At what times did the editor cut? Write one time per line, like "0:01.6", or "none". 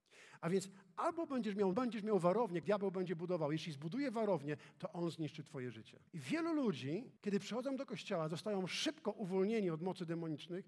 0:01.7
0:02.6
0:06.1
0:07.2